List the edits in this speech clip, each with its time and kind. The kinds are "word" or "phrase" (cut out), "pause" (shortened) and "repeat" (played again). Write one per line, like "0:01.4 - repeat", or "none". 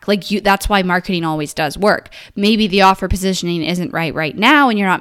none